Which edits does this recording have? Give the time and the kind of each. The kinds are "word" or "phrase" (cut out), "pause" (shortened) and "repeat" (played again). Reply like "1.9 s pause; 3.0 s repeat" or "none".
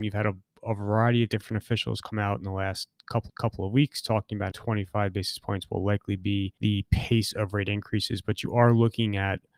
3.3 s repeat; 4.5 s word; 6.6 s pause